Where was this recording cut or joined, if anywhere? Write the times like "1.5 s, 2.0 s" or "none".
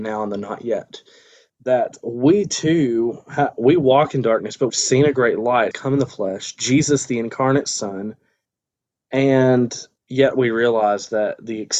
4.7 s, 5.7 s, 8.7 s